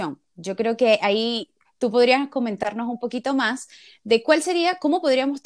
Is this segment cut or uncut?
uncut